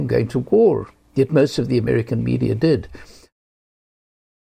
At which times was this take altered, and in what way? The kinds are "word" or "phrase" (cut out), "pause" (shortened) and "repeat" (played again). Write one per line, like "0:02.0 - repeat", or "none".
none

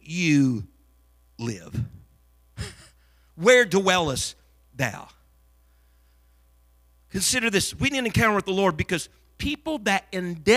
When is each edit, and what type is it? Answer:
0:02.2 - pause

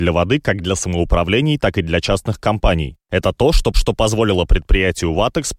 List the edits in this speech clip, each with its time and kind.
0:03.7 - repeat

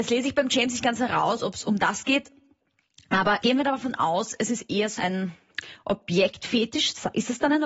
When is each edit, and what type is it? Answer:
0:03.4 - word
0:05.0 - word

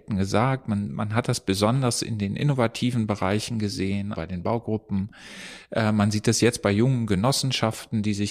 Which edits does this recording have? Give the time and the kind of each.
0:04.1 - word

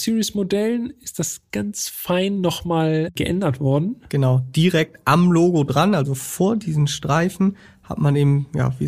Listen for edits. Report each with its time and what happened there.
0:01.5 - word

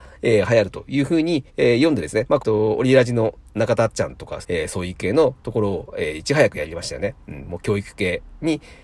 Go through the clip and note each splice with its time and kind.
0:01.5 - pause
0:02.4 - phrase
0:04.4 - phrase

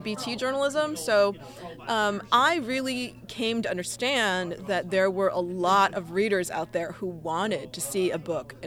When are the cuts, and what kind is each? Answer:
none

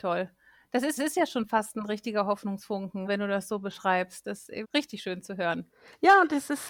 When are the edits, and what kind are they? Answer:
0:01.0 - repeat
0:03.1 - word
0:04.6 - word

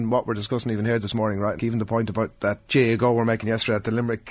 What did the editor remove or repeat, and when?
0:01.6 - word
0:02.7 - word

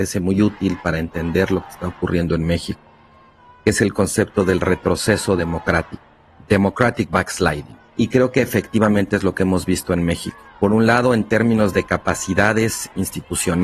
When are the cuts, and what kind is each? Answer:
none

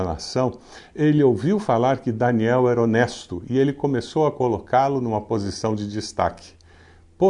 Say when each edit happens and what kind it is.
none

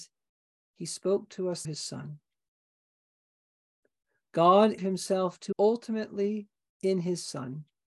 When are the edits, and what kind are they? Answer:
0:01.6 - word
0:04.8 - word
0:05.5 - word

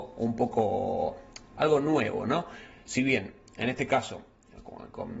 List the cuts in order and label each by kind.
none

